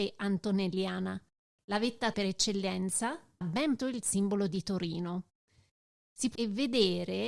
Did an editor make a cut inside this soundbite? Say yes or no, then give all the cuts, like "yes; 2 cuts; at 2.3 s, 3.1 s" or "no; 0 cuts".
yes; 4 cuts; at 2.1 s, 3.4 s, 3.8 s, 6.4 s